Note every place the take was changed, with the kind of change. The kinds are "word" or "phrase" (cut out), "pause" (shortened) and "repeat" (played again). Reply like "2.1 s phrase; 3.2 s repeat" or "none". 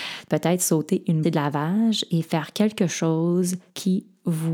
1.2 s word